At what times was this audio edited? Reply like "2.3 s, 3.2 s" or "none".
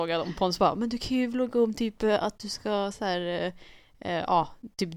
none